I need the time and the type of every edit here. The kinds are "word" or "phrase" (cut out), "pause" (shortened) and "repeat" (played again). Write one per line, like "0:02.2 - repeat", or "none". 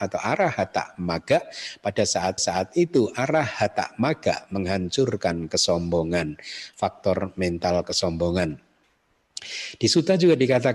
0:02.4 - repeat

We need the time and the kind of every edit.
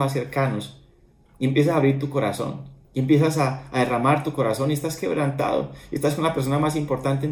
0:02.8 - pause

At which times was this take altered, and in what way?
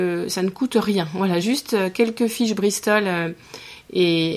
none

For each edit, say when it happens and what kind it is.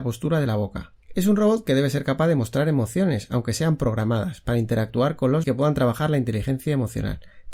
0:01.0 - pause
0:05.4 - phrase

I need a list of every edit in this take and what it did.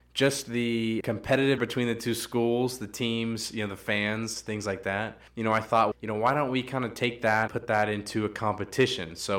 0:01.0 - word
0:01.6 - word
0:05.3 - pause
0:05.9 - word
0:07.5 - word

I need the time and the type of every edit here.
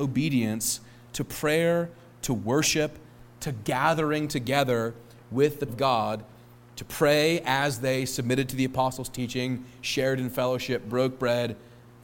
0:05.7 - word

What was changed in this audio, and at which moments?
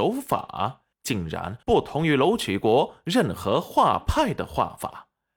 0:00.9 - pause
0:01.6 - pause

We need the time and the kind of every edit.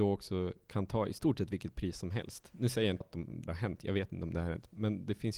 0:03.0 - word
0:03.5 - word

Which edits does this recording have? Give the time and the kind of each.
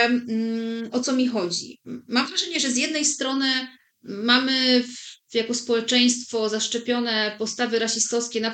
0:03.8 - pause

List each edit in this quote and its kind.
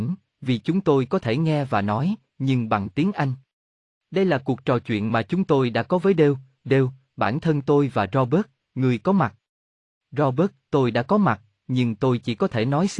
none

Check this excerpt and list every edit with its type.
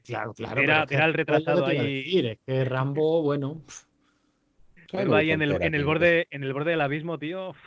none

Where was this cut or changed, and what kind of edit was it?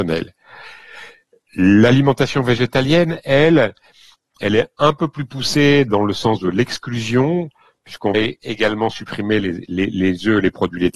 0:08.1 - word

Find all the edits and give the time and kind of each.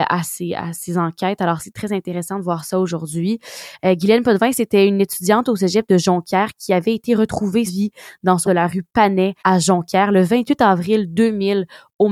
0:01.6 - word
0:07.7 - word
0:08.4 - word
0:09.4 - pause

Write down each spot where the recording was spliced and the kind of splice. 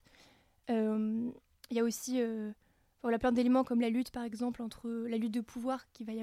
none

